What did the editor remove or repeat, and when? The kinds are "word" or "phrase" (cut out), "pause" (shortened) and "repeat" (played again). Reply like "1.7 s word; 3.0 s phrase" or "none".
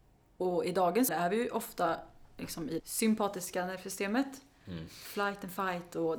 1.1 s word; 2.8 s word